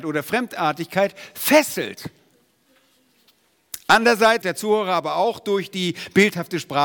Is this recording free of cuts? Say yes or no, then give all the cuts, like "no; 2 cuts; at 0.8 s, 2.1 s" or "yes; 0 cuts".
no; 1 cut; at 4.4 s